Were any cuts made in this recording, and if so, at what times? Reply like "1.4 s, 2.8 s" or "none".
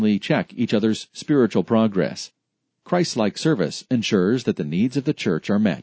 none